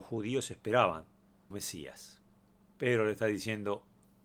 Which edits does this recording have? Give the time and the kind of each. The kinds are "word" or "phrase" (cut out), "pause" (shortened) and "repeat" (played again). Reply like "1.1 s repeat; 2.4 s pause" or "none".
1.5 s word